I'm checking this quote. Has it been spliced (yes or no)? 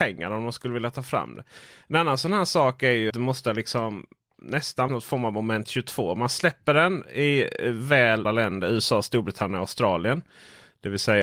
yes